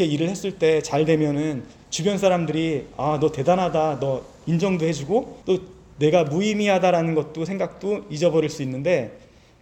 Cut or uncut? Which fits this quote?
cut